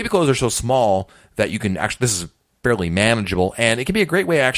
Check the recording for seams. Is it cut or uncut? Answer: uncut